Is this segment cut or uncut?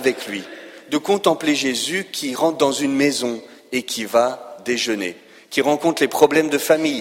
uncut